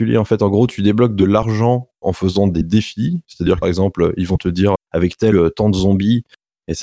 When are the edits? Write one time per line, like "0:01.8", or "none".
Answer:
0:01.9
0:03.6
0:04.8
0:05.3